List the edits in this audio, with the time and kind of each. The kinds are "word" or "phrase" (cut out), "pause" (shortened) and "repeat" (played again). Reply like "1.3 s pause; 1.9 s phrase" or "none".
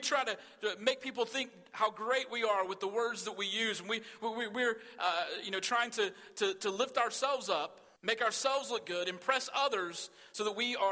8.0 s pause